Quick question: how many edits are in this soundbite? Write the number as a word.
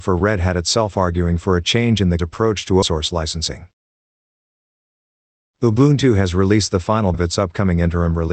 three